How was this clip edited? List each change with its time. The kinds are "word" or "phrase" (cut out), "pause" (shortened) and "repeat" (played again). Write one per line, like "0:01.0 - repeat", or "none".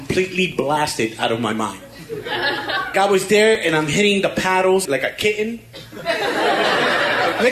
0:02.9 - word
0:04.9 - word